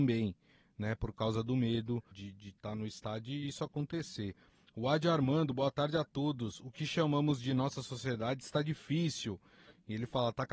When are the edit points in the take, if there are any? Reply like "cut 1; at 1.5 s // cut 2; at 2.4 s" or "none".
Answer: cut 1; at 2.1 s

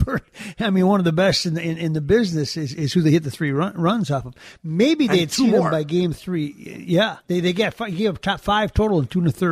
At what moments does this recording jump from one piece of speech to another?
cut 1; at 7.2 s

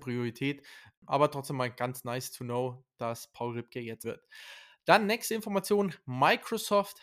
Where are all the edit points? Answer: cut 1; at 4.0 s

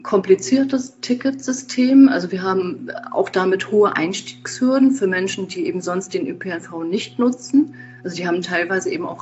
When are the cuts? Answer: none

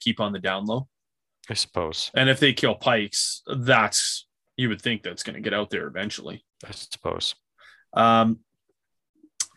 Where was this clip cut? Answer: cut 1; at 6.5 s

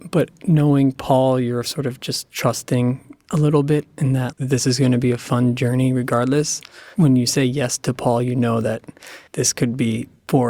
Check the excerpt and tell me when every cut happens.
cut 1; at 4.3 s // cut 2; at 6.9 s // cut 3; at 9.3 s

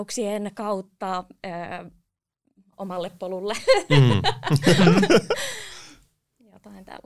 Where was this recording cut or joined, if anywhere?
none

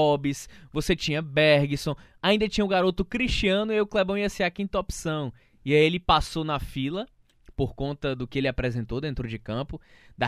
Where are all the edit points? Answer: none

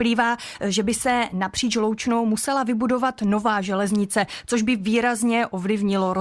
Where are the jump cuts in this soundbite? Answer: none

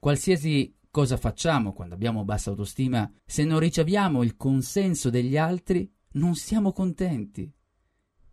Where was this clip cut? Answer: cut 1; at 3.2 s

